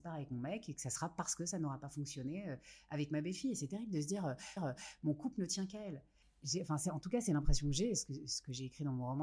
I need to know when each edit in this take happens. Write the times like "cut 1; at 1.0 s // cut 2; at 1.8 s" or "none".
cut 1; at 4.6 s